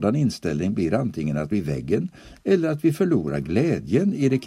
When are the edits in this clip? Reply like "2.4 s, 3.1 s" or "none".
1.5 s